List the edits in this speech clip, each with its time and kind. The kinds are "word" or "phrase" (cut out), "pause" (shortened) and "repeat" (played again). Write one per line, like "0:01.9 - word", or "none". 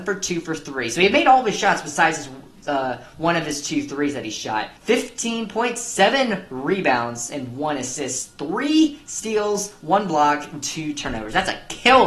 0:04.8 - pause